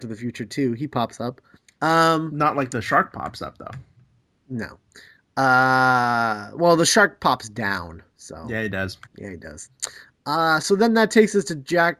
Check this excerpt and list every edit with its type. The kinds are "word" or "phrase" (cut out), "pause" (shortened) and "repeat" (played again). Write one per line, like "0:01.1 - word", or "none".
0:01.6 - pause
0:08.1 - pause
0:09.1 - pause